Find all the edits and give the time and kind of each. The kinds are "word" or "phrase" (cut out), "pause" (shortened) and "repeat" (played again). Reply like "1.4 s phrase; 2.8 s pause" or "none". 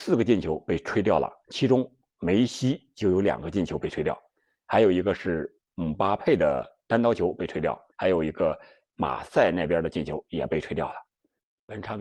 7.9 s pause